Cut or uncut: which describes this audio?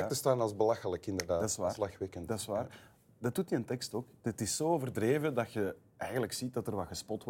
uncut